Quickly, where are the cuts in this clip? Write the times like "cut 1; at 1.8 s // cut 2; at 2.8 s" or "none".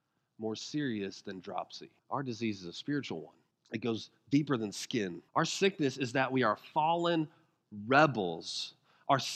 cut 1; at 2.0 s // cut 2; at 3.5 s // cut 3; at 5.3 s